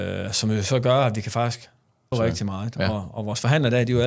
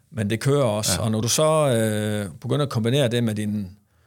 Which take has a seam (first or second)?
first